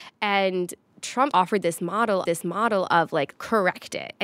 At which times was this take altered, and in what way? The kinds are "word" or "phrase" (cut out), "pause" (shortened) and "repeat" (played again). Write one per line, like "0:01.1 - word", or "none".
0:01.3 - phrase
0:02.3 - repeat
0:03.3 - word